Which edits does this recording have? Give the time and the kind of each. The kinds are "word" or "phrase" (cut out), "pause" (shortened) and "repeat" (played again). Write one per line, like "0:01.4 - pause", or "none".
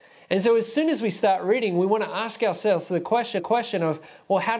0:03.4 - repeat